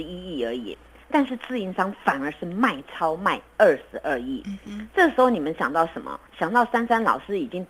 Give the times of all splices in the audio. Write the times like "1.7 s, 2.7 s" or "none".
6.3 s